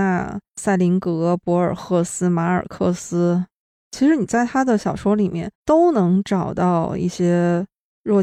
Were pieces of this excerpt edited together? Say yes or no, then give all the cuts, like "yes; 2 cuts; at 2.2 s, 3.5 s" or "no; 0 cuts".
yes; 1 cut; at 5.6 s